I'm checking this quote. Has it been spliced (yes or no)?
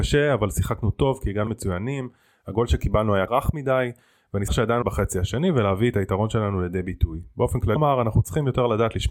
yes